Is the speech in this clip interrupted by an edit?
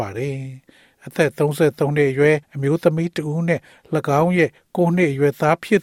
yes; 1 cut; at 2.4 s

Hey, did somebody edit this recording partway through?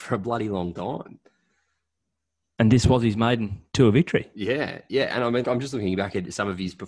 yes; 1 cut; at 5.4 s

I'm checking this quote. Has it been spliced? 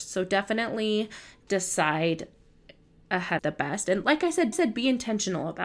yes; 2 cuts; at 3.4 s, 4.5 s

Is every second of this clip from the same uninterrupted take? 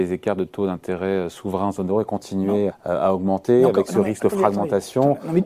no; 1 cut; at 2.7 s

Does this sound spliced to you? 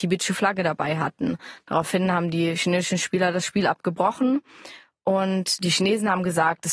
no; 0 cuts

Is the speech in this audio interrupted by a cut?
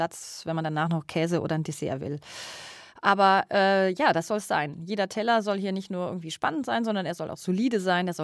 no; 0 cuts

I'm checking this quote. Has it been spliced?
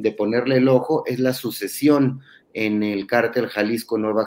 no; 0 cuts

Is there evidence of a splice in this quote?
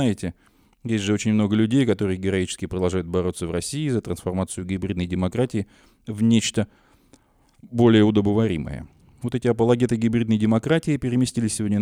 no; 0 cuts

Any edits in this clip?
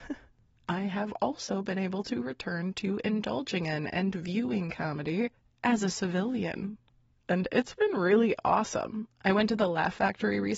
no; 0 cuts

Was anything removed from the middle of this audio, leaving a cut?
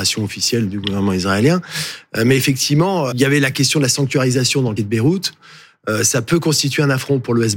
yes; 2 cuts; at 3.1 s, 4.8 s

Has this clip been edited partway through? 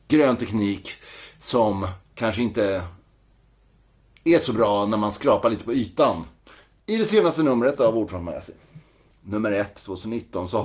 no; 0 cuts

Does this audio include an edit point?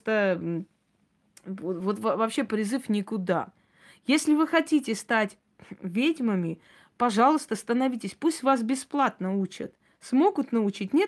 no; 0 cuts

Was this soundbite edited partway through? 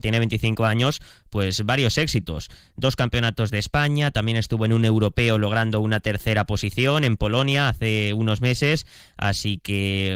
no; 0 cuts

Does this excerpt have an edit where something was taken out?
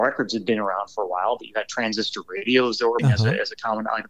yes; 1 cut; at 3.0 s

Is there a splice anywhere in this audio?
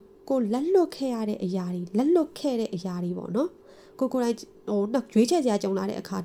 yes; 1 cut; at 4.5 s

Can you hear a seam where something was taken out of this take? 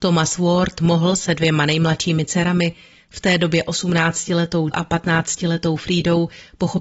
yes; 1 cut; at 4.7 s

